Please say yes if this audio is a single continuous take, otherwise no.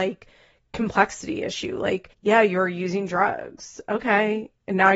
no